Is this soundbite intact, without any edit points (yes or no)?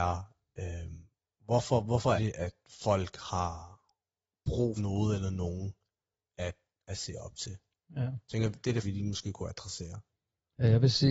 no